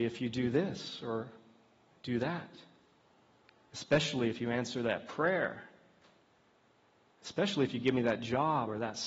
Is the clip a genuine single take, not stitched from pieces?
yes; 0 cuts

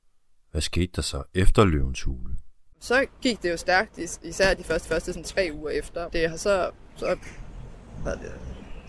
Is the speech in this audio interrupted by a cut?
yes; 3 cuts; at 3.1 s, 4.8 s, 6.1 s

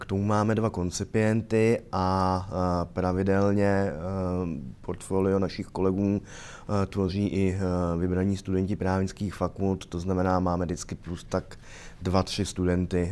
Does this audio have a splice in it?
no; 0 cuts

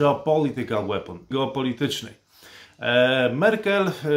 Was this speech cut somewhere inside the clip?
yes; 1 cut; at 1.3 s

